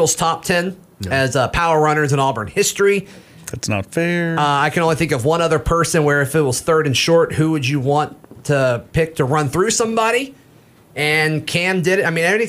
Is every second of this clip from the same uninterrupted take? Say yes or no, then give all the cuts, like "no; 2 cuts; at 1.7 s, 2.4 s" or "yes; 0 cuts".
yes; 0 cuts